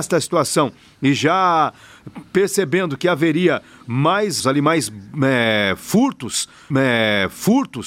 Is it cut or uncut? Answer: cut